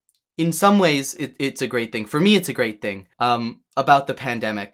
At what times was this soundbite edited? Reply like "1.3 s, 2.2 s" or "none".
3.1 s